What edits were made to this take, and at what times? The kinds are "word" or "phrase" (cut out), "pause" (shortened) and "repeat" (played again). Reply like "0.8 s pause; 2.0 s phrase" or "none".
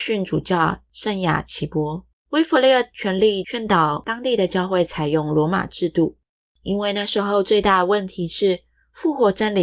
2.2 s pause; 6.3 s pause